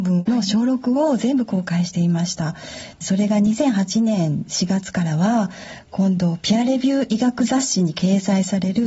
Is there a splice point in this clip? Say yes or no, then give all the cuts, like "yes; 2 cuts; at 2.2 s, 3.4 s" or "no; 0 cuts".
no; 0 cuts